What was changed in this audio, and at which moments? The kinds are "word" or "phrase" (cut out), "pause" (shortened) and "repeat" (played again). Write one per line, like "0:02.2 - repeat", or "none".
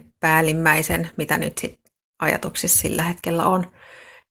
none